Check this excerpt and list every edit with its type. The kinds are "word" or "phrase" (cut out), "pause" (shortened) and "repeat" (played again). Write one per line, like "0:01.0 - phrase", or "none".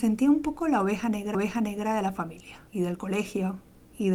0:01.3 - repeat
0:02.7 - pause